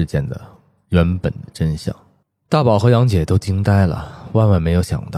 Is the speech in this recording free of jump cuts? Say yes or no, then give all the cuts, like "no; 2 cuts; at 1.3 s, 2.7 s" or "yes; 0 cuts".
no; 1 cut; at 2.2 s